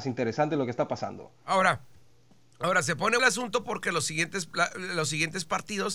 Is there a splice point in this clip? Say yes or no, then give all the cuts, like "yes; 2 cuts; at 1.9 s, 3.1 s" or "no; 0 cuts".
yes; 1 cut; at 3.2 s